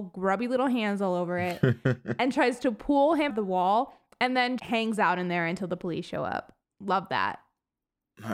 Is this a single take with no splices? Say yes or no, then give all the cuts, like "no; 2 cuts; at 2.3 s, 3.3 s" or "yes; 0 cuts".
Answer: no; 3 cuts; at 3.3 s, 4.6 s, 6.6 s